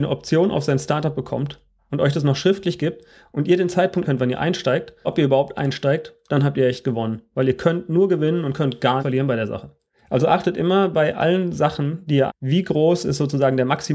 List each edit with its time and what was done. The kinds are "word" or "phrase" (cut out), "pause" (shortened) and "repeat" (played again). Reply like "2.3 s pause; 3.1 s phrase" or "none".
4.0 s word; 5.0 s word; 9.0 s word; 12.3 s word